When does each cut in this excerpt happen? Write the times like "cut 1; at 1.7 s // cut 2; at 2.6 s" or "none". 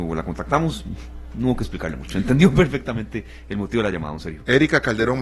none